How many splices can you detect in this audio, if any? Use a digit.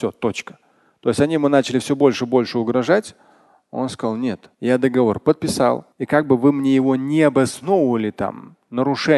2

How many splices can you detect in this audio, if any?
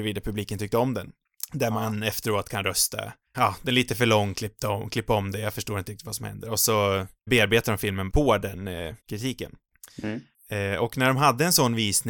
4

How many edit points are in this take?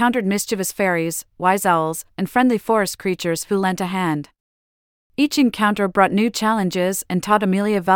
0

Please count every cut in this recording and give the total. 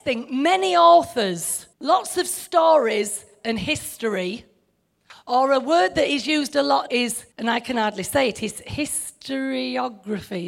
3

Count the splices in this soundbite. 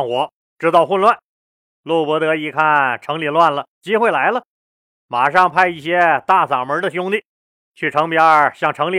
1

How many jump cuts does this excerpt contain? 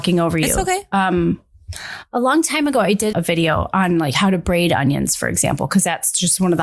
1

